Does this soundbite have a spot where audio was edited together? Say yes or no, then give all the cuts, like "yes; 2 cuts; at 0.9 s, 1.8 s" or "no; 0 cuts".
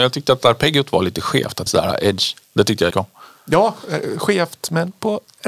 yes; 2 cuts; at 1.7 s, 2.9 s